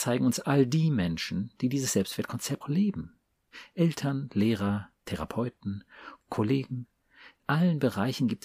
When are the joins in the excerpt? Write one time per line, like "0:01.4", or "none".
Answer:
0:02.6
0:07.4